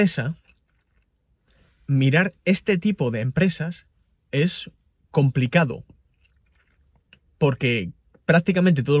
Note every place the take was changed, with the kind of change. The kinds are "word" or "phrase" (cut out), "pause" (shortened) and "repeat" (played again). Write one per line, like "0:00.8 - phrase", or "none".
none